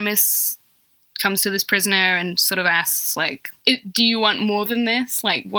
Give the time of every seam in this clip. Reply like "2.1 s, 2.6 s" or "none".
none